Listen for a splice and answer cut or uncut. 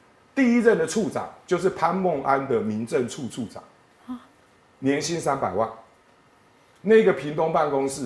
uncut